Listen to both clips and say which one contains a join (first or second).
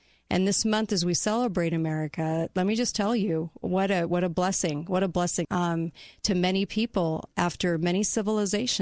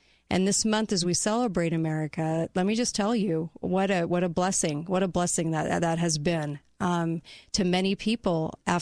first